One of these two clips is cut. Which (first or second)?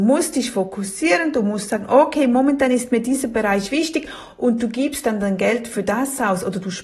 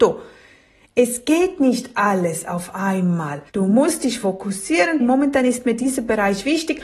second